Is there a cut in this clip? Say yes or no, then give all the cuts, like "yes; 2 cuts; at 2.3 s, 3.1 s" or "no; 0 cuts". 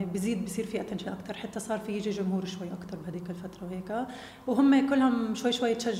no; 0 cuts